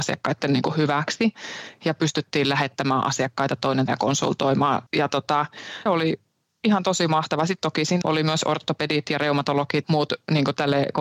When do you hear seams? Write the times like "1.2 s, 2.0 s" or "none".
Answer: 3.9 s, 4.9 s, 5.9 s, 8.0 s, 9.8 s

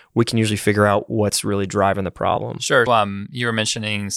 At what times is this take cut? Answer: 2.9 s

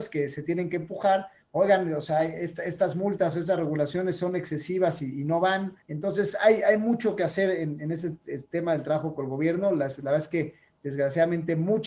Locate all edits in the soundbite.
5.8 s

